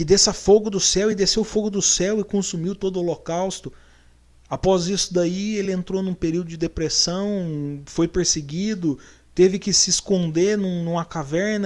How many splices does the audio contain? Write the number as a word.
zero